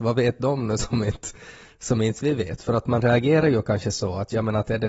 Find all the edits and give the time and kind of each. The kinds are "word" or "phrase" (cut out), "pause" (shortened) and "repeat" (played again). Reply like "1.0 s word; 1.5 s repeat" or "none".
none